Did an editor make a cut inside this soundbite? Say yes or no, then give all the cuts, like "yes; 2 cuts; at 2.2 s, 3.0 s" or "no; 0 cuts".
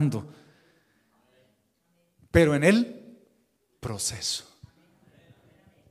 no; 0 cuts